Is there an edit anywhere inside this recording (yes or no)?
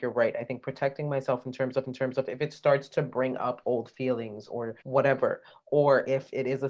yes